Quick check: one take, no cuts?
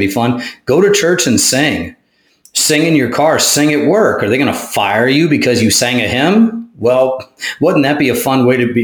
yes; 0 cuts

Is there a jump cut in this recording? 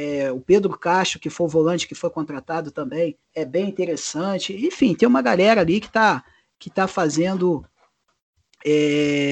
yes; 1 cut; at 3.2 s

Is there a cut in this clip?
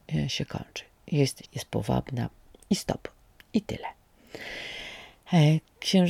yes; 1 cut; at 1.4 s

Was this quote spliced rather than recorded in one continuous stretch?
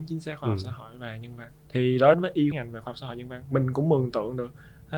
yes; 3 cuts; at 1.6 s, 2.1 s, 2.5 s

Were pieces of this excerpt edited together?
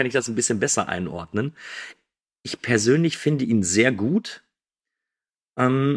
no; 0 cuts

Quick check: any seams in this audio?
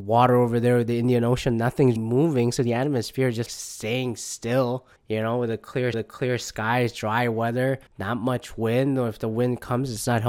yes; 5 cuts; at 2.0 s, 3.5 s, 5.0 s, 5.9 s, 7.9 s

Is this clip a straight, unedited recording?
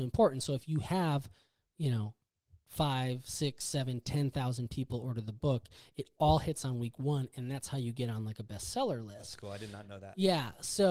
yes; 0 cuts

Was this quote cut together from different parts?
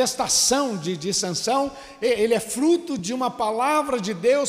no; 0 cuts

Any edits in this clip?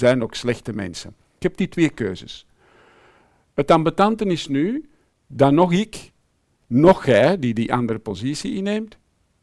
no; 0 cuts

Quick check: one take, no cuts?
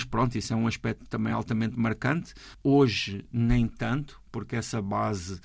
yes; 0 cuts

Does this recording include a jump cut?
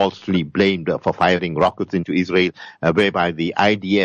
no; 0 cuts

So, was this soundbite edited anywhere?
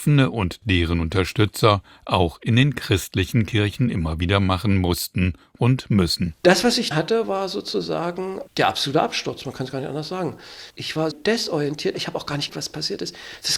yes; 5 cuts; at 6.9 s, 8.5 s, 10.7 s, 11.1 s, 12.5 s

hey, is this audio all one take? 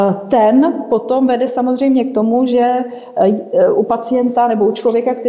yes; 0 cuts

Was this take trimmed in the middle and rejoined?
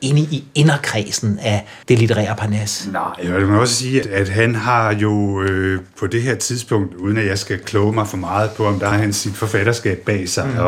yes; 3 cuts; at 1.8 s, 4.0 s, 8.9 s

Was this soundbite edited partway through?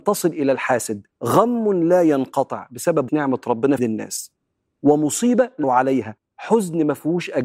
yes; 4 cuts; at 1.1 s, 3.1 s, 3.8 s, 5.6 s

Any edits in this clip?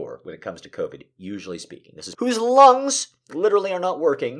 yes; 1 cut; at 2.1 s

